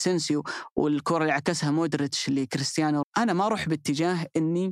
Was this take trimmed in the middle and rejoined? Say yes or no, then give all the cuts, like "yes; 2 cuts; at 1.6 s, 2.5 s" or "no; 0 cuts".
yes; 1 cut; at 3.0 s